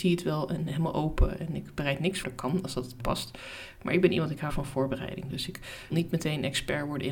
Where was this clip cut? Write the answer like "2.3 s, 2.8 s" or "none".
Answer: 2.2 s, 3.0 s, 4.5 s, 5.9 s

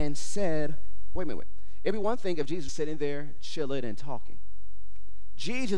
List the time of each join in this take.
1.2 s, 2.7 s

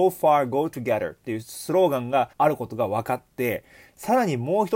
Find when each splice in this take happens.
2.3 s

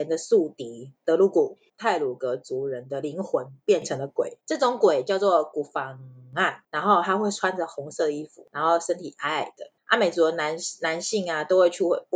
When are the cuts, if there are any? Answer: 1.0 s

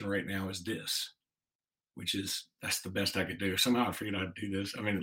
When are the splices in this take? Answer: none

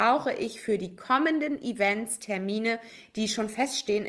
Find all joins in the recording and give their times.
none

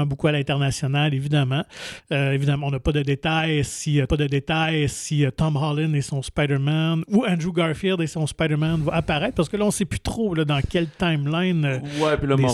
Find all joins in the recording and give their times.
4.1 s

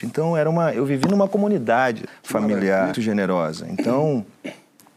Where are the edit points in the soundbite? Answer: 2.1 s, 2.9 s

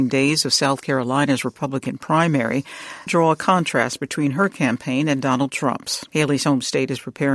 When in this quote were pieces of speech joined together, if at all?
3.1 s, 6.1 s

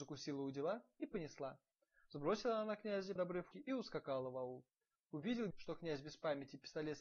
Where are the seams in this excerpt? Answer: 3.2 s, 3.5 s, 5.5 s

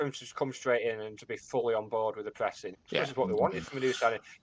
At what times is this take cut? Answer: 1.2 s, 2.7 s

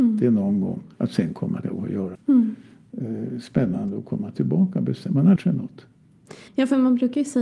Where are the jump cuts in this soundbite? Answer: 0.9 s, 1.6 s, 2.1 s, 5.4 s, 6.5 s

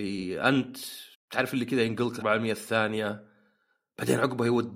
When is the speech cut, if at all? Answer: 1.1 s, 2.2 s

